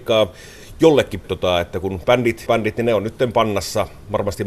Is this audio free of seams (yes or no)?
no